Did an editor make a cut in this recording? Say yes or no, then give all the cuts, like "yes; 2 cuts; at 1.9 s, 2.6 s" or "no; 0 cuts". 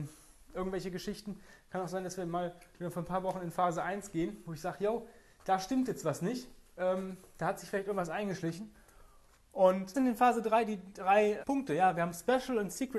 yes; 2 cuts; at 9.9 s, 11.4 s